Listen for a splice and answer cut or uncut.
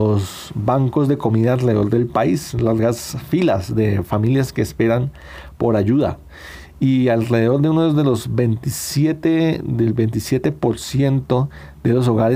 uncut